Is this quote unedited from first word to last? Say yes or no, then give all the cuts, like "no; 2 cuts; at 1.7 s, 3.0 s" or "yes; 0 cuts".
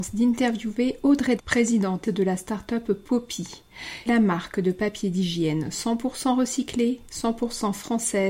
no; 3 cuts; at 1.4 s, 2.0 s, 4.1 s